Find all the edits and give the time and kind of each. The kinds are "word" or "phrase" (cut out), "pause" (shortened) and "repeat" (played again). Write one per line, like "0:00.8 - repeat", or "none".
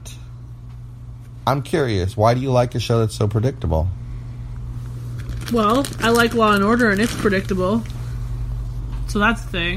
none

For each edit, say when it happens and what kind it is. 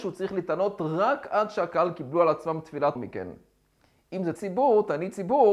0:03.0 - phrase
0:04.4 - word

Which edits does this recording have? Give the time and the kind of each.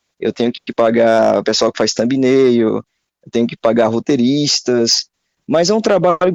none

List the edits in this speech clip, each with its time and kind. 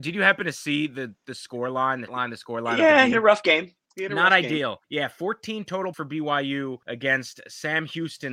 0:02.1 - word
0:03.1 - phrase
0:03.8 - pause
0:04.8 - pause
0:05.9 - word
0:06.8 - pause

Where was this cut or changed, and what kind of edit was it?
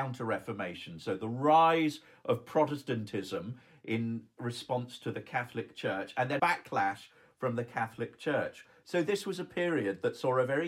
0:06.4 - word

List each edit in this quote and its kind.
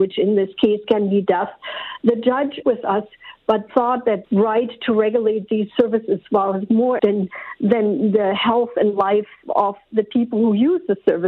0:02.6 - word
0:04.2 - phrase
0:07.0 - word

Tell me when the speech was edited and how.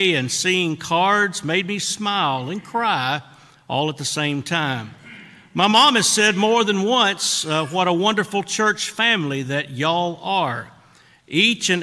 none

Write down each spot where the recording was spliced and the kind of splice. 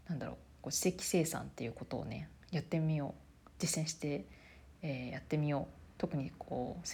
0:02.4 - pause

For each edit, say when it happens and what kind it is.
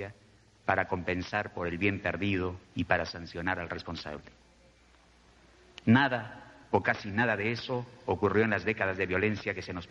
0:02.6 - pause
0:06.6 - pause

